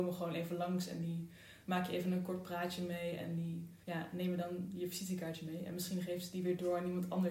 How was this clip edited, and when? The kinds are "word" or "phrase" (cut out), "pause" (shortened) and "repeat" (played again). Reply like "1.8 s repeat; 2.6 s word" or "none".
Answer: 3.8 s pause